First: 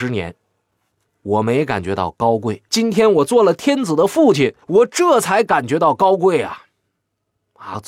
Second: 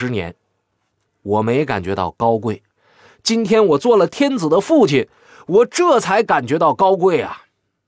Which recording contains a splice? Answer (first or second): first